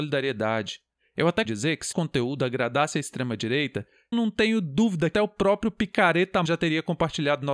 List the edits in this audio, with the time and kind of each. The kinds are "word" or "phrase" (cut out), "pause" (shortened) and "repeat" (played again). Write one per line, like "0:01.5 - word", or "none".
0:01.4 - word
0:01.9 - word
0:04.1 - word
0:05.1 - word
0:06.5 - word